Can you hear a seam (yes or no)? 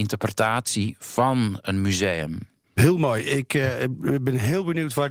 yes